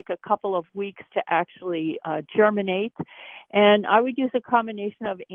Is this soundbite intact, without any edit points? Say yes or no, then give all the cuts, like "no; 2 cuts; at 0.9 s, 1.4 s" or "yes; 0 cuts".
yes; 0 cuts